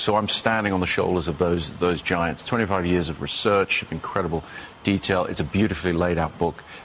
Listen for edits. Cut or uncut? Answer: uncut